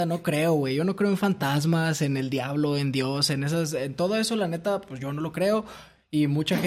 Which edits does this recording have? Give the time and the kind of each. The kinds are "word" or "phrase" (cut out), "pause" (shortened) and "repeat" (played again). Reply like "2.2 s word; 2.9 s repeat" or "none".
none